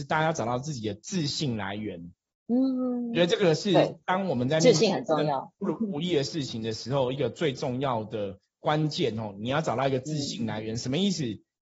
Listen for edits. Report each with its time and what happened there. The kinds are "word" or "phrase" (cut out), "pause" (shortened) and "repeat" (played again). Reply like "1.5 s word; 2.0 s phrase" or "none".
none